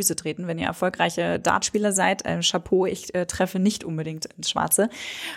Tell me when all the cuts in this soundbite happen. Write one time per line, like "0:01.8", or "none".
none